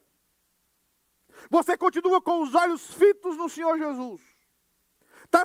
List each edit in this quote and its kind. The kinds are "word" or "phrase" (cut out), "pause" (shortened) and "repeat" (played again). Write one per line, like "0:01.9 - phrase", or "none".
none